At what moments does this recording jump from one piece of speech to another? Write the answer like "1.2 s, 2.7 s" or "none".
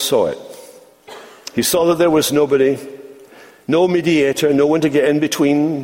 none